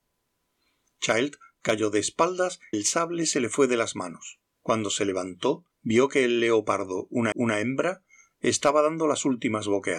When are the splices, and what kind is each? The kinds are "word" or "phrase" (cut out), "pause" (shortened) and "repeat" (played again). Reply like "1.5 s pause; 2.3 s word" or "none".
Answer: 2.7 s word; 4.5 s pause; 5.7 s pause; 7.3 s repeat